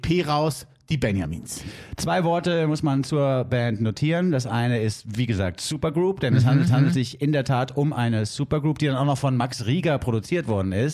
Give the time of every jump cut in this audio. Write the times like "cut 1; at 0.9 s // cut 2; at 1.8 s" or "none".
cut 1; at 6.7 s